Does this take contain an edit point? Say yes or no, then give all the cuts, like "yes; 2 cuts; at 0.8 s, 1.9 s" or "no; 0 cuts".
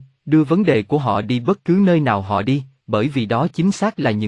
no; 0 cuts